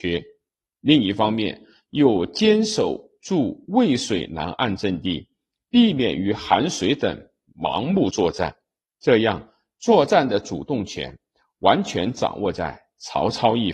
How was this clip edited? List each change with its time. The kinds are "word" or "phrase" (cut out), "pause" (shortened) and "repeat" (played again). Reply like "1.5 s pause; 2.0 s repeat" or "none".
none